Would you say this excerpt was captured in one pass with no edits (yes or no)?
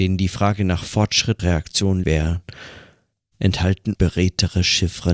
no